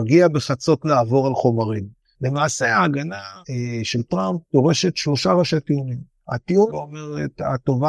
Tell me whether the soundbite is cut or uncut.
cut